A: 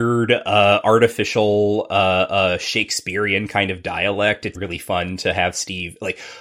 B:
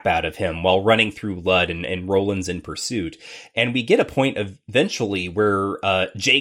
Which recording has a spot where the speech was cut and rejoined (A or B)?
A